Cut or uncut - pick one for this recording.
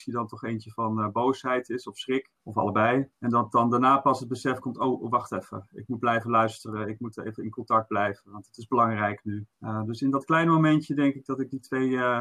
cut